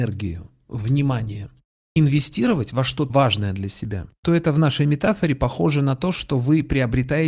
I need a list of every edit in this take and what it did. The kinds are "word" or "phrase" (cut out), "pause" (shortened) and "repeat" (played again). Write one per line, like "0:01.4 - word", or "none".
0:03.1 - word